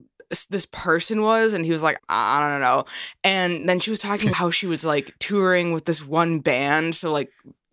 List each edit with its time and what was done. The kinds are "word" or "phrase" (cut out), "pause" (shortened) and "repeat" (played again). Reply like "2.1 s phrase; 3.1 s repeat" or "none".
2.0 s word; 4.3 s word